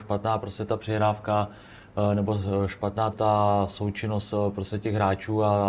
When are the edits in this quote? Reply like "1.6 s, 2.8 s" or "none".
3.1 s